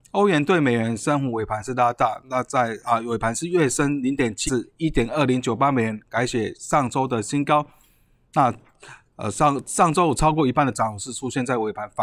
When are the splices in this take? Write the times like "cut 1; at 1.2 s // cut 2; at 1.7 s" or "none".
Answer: cut 1; at 4.5 s